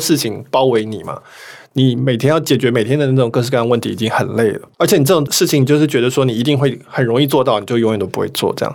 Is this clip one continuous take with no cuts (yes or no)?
no